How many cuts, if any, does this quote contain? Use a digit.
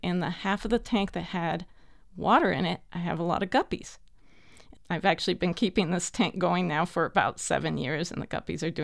0